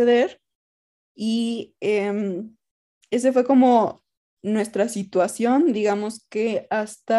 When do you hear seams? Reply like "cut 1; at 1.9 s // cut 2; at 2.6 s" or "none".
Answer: none